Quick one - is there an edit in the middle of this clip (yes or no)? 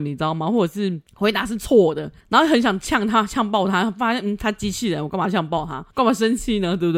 yes